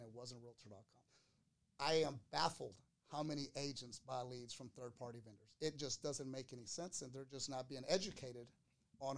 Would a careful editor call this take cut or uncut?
uncut